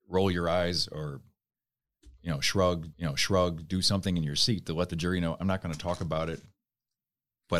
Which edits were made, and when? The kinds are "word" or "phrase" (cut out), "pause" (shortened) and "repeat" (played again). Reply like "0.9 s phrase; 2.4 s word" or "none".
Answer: 2.9 s repeat

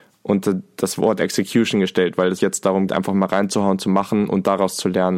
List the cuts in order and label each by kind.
2.4 s word; 2.9 s word

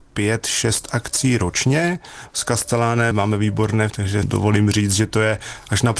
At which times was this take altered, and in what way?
3.1 s word; 3.9 s word; 4.2 s word

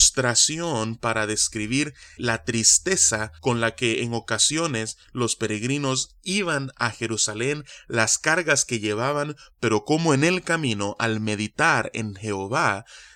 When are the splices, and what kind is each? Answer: 2.2 s word; 3.4 s pause

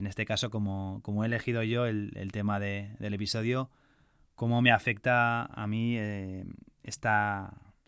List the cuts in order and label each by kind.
none

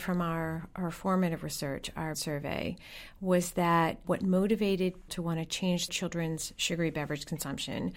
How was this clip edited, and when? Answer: 2.1 s word; 4.0 s word; 5.1 s word; 5.9 s word

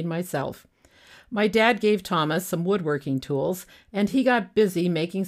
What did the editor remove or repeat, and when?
none

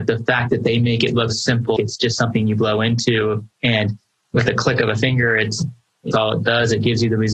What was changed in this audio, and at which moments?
1.3 s word; 1.8 s word; 6.1 s word

